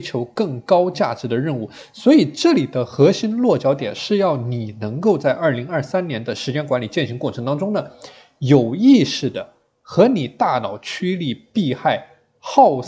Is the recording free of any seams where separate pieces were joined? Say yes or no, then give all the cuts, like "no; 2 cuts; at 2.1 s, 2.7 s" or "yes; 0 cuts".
yes; 0 cuts